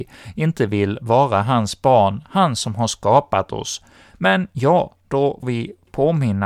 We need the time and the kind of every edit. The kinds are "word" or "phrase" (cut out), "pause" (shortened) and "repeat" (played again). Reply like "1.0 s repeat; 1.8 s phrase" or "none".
5.4 s word